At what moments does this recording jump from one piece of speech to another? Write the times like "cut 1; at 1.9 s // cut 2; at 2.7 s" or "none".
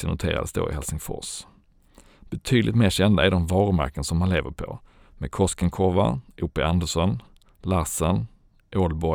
none